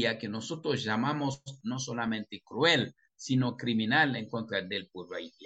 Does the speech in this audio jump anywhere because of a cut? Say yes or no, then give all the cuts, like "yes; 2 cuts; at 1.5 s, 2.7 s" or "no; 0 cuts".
yes; 1 cut; at 1.6 s